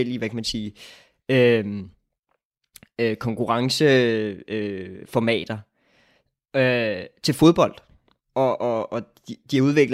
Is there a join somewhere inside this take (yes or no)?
no